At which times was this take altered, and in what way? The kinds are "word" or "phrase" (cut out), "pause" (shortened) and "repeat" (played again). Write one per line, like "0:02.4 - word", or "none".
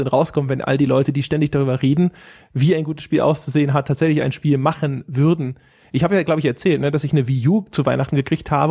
none